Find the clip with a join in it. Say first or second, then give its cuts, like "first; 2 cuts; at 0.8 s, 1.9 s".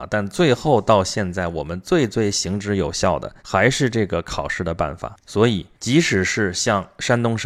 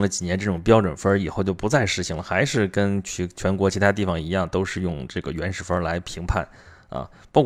first; 3 cuts; at 3.4 s, 5.2 s, 5.7 s